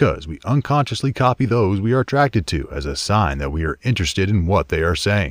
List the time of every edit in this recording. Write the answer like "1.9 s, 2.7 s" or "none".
none